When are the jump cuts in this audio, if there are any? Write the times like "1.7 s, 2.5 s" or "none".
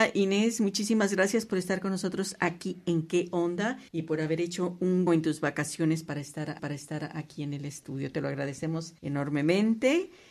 3.9 s, 5.1 s, 6.6 s, 9.0 s